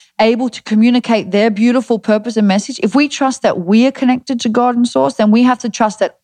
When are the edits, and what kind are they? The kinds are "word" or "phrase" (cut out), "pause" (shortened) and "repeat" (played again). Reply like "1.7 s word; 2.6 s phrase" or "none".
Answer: none

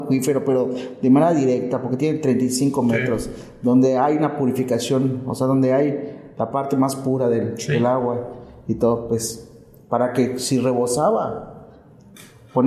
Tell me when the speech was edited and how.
none

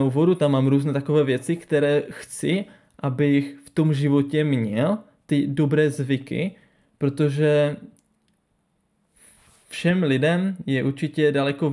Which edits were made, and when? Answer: none

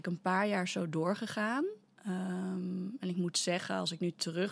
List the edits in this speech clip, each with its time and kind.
none

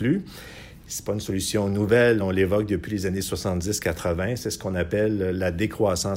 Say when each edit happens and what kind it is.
none

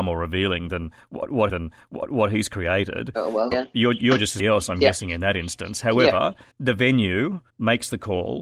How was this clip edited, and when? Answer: 1.5 s repeat; 3.5 s word; 4.4 s phrase; 6.5 s pause; 7.5 s pause

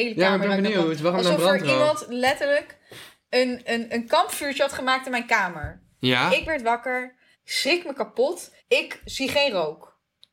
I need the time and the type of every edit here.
7.3 s pause; 8.6 s pause

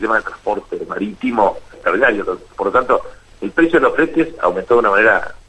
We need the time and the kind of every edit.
1.7 s phrase

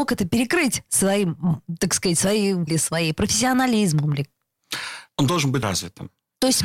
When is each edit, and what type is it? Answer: 2.7 s word; 5.1 s pause; 5.6 s word

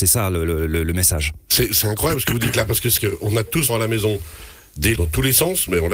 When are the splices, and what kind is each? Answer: 3.0 s word; 3.7 s word; 5.0 s word

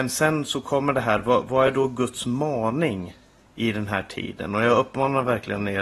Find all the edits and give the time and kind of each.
none

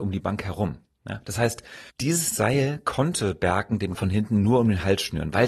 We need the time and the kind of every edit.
1.9 s pause; 3.9 s word

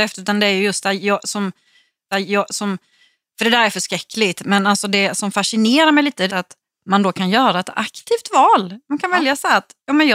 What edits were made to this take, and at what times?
2.1 s repeat; 6.3 s word

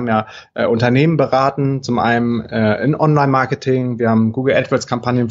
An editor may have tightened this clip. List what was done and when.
none

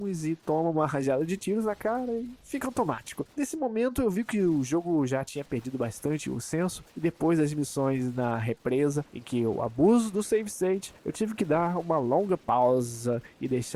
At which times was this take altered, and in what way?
3.3 s pause; 6.9 s pause; 9.1 s pause; 11.0 s pause

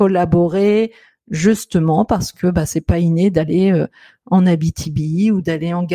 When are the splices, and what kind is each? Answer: none

